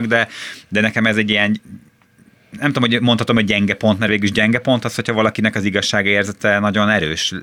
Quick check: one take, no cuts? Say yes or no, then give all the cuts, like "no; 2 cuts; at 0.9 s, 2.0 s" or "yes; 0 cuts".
yes; 0 cuts